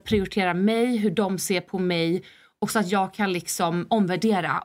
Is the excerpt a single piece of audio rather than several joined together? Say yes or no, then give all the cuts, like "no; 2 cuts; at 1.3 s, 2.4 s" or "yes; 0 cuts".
yes; 0 cuts